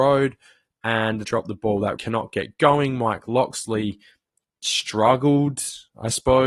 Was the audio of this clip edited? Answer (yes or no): yes